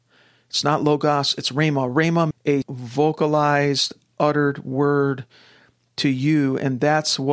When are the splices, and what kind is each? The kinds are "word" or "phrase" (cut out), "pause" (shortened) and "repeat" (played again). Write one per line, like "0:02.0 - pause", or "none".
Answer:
0:02.3 - word
0:02.6 - word

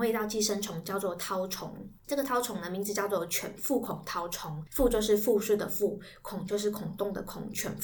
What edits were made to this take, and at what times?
0:02.0 - pause

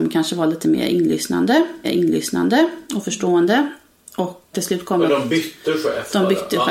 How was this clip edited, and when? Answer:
0:01.8 - repeat
0:04.5 - word

